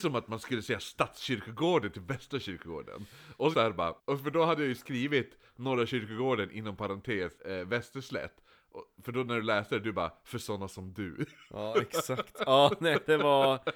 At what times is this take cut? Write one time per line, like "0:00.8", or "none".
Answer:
0:03.5
0:04.0
0:07.4